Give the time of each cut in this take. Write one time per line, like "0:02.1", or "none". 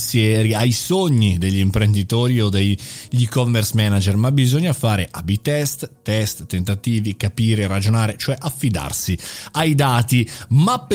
none

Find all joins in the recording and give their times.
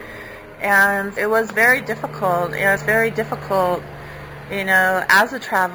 0:01.2
0:02.8

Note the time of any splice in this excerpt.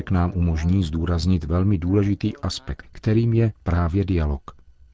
0:02.8

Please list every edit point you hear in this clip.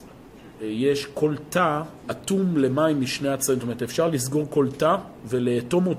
0:02.0

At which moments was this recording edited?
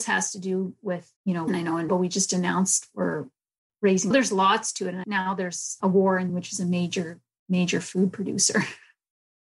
0:01.2
0:01.5
0:01.9
0:04.1
0:05.0
0:05.8
0:06.3

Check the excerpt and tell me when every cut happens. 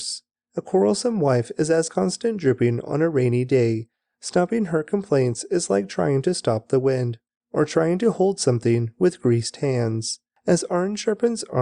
0:01.9

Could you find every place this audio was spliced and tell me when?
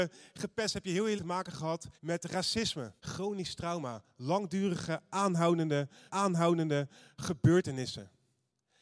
0:01.2
0:02.0
0:03.0
0:06.1

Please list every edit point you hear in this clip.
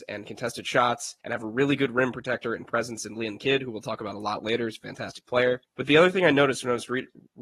0:01.2
0:05.7

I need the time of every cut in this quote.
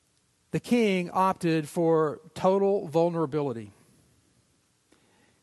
none

